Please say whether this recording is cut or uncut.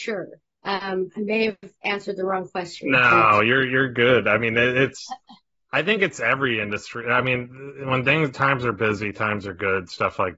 uncut